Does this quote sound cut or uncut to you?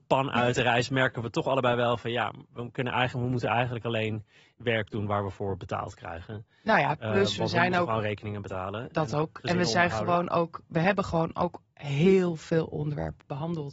uncut